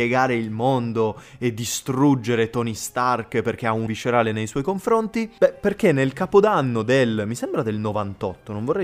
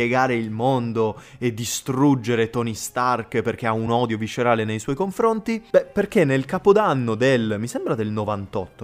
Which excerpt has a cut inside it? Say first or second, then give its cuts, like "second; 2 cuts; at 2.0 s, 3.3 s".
first; 1 cut; at 3.9 s